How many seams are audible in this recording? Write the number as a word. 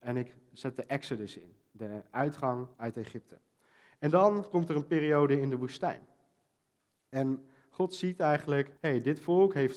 two